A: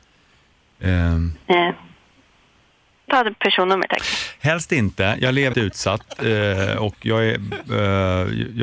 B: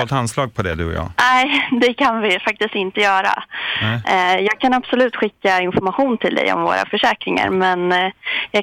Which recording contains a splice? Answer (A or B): A